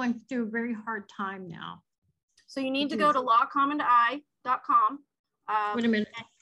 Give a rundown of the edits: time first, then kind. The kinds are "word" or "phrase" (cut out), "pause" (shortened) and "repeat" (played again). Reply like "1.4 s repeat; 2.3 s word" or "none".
2.2 s pause